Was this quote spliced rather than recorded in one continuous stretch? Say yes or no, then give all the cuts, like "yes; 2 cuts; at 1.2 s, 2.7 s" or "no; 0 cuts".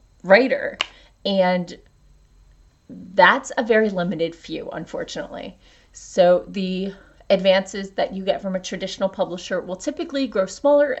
no; 0 cuts